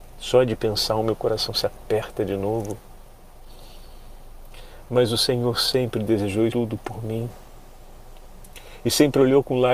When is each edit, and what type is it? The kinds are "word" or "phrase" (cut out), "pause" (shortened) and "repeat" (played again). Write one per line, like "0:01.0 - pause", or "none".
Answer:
0:06.5 - word